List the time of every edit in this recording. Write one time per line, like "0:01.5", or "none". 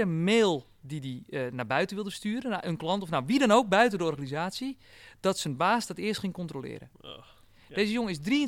none